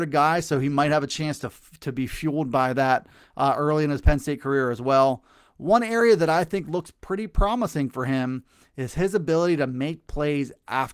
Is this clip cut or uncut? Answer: uncut